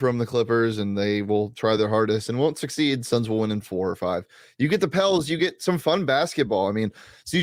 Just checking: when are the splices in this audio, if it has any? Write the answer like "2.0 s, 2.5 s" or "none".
none

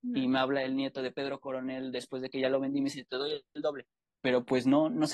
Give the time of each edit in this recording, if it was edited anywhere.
none

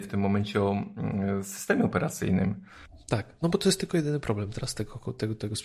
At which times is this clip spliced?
none

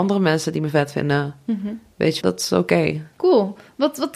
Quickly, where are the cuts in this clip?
2.2 s, 3.1 s

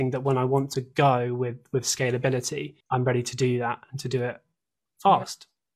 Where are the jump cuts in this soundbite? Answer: 2.8 s

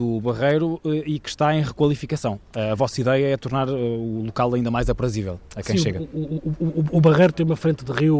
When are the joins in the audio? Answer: none

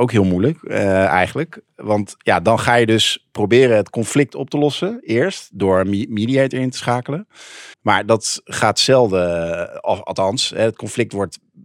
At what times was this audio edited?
7.7 s

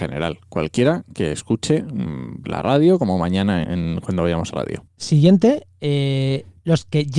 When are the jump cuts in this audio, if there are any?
2.4 s, 3.6 s, 4.5 s, 4.9 s

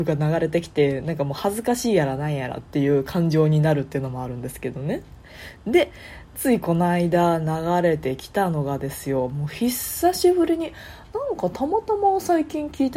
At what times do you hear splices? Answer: none

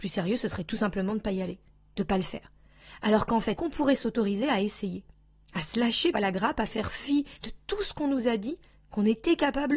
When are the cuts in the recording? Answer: 3.6 s, 6.1 s, 7.4 s

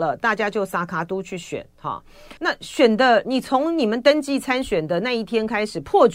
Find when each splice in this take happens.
2.4 s

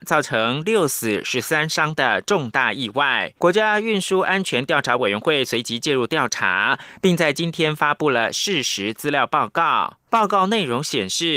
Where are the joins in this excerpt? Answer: 3.4 s, 10.1 s

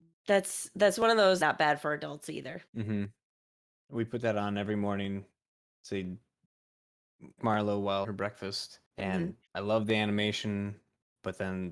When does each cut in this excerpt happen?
1.4 s, 2.7 s, 7.4 s, 8.0 s, 8.9 s, 9.5 s

